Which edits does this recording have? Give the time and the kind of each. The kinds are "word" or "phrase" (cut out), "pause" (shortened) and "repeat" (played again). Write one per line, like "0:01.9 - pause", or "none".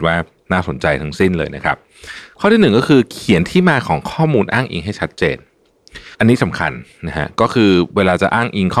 0:06.1 - pause